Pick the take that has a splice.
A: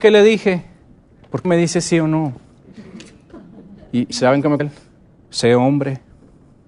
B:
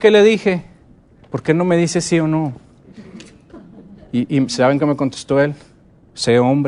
A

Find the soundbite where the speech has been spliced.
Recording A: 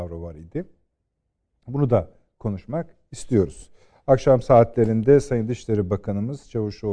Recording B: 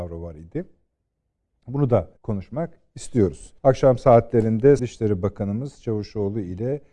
B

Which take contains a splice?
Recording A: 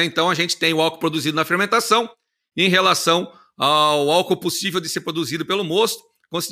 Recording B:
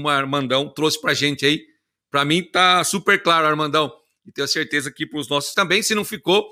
B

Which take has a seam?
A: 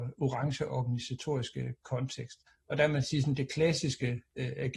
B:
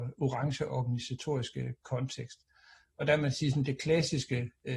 A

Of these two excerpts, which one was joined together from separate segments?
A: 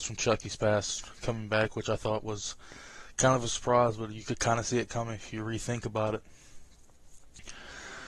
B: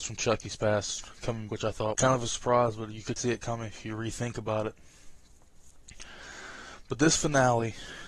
B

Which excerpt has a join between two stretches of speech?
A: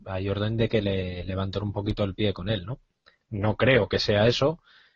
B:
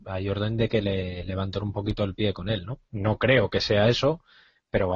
B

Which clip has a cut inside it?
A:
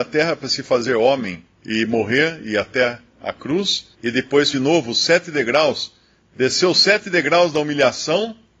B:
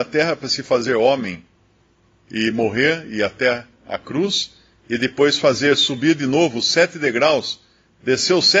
A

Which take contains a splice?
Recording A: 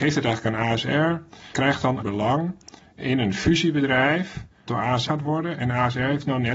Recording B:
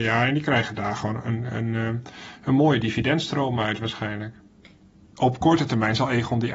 A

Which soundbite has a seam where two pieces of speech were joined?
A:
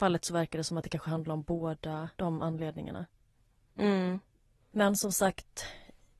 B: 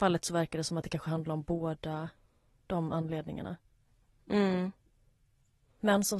A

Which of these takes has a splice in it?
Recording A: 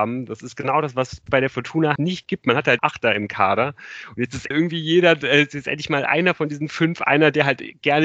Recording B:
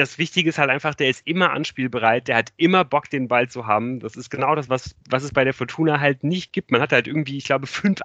A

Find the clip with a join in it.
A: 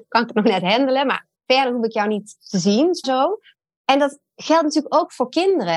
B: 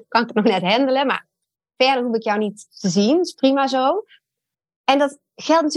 A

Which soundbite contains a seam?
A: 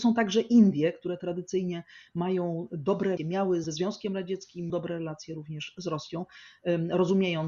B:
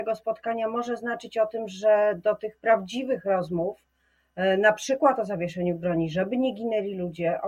A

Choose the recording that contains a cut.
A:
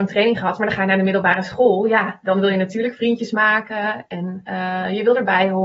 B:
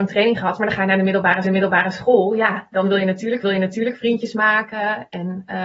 B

